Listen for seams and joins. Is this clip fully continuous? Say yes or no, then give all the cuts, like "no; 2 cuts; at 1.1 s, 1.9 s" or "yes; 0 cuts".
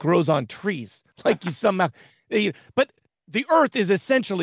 yes; 0 cuts